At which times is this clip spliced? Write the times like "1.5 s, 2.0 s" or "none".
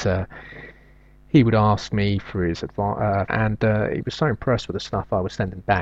3.3 s